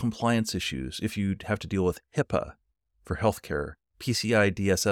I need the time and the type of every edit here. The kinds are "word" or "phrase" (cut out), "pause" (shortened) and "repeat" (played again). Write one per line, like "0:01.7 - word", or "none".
none